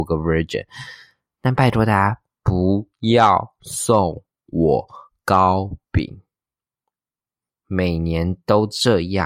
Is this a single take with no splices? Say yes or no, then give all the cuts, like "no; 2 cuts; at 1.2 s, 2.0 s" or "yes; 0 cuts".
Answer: yes; 0 cuts